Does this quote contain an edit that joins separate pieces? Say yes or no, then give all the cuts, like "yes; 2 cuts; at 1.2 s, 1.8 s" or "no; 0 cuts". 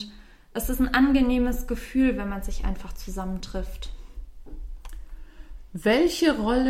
no; 0 cuts